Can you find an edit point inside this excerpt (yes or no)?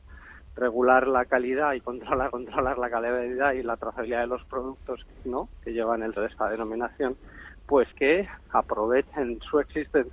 yes